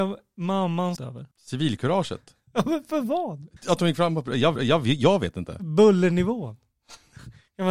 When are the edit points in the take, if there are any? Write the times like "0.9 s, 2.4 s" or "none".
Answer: 1.0 s, 1.3 s, 3.6 s, 4.6 s